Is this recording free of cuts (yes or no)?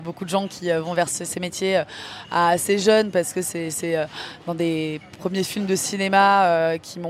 yes